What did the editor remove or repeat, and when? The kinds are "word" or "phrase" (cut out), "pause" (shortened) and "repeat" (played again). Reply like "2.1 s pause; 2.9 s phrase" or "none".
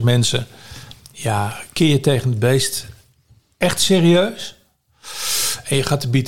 none